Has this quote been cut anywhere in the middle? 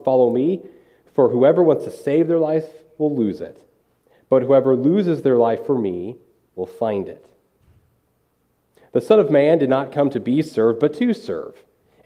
no; 0 cuts

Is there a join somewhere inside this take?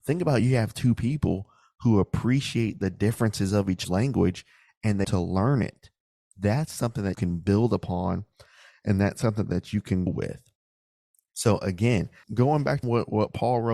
yes; 6 cuts; at 3.8 s, 5.0 s, 7.1 s, 10.1 s, 12.2 s, 12.8 s

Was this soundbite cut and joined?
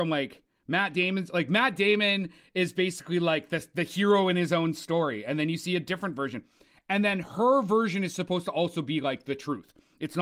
no; 0 cuts

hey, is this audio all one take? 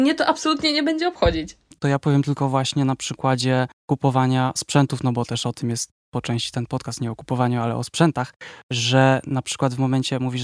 no; 1 cut; at 1.7 s

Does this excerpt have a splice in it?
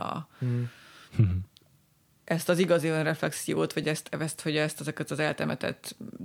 no; 0 cuts

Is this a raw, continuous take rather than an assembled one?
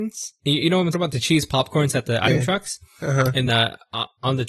no; 3 cuts; at 0.9 s, 2.3 s, 3.5 s

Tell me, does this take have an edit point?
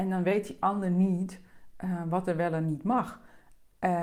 no; 0 cuts

